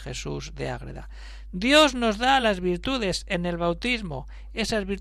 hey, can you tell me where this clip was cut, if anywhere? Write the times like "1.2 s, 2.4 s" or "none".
none

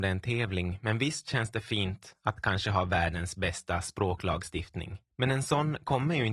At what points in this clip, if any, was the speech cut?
5.1 s

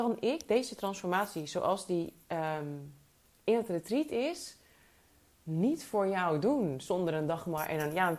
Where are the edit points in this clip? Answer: none

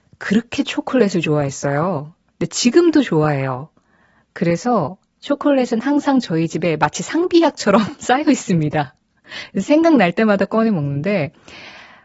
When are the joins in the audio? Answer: none

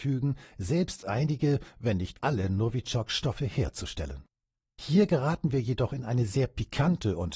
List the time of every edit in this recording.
2.2 s

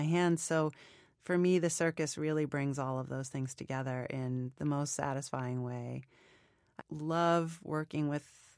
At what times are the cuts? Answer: 6.8 s

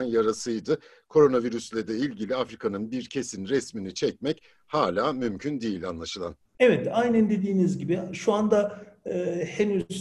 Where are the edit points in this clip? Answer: none

